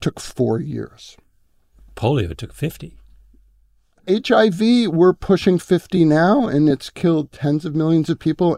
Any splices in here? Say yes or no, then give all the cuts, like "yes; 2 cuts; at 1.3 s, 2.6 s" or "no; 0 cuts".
no; 0 cuts